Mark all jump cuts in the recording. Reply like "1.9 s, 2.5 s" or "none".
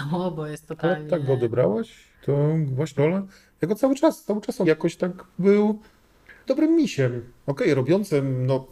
2.1 s, 3.0 s, 4.6 s, 6.5 s, 7.4 s